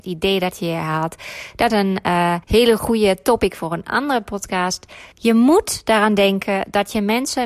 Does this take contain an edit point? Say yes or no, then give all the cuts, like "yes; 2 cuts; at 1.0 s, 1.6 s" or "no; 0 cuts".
yes; 3 cuts; at 1.7 s, 2.4 s, 5.1 s